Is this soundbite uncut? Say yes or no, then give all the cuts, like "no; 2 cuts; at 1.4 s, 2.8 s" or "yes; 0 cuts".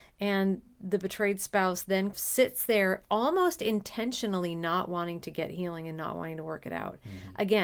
yes; 0 cuts